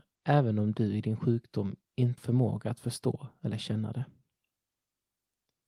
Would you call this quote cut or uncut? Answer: cut